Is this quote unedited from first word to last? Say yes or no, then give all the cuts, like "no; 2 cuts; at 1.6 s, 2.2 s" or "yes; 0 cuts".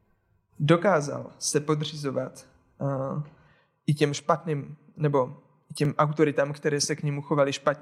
yes; 0 cuts